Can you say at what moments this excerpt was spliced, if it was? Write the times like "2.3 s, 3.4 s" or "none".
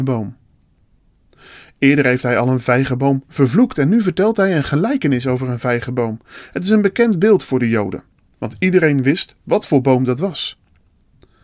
none